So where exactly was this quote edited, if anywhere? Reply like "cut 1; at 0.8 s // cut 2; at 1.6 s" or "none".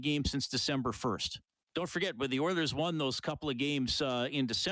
cut 1; at 1.6 s